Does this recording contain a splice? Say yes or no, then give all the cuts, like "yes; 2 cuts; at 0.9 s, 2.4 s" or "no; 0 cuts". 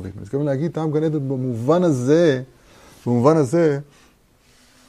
no; 0 cuts